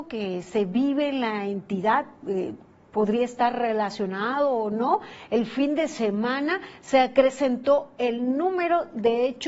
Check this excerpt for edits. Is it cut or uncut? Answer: uncut